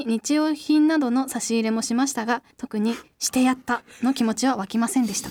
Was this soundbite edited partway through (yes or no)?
yes